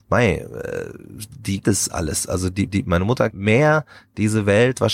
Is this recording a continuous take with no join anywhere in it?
no; 3 cuts; at 1.6 s, 2.7 s, 3.3 s

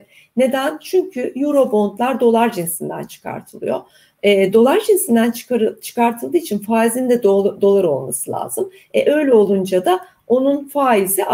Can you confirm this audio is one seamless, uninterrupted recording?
yes; 0 cuts

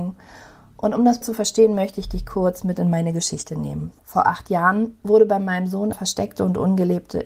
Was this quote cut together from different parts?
yes; 3 cuts; at 1.2 s, 4.0 s, 5.9 s

